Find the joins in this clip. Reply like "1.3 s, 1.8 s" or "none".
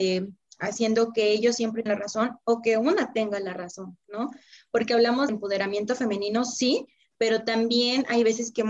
1.9 s, 5.3 s